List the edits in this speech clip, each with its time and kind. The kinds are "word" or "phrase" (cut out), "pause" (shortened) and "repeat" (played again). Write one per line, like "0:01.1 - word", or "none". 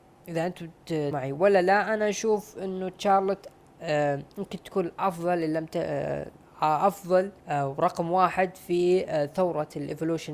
0:01.1 - word
0:04.3 - pause
0:07.4 - pause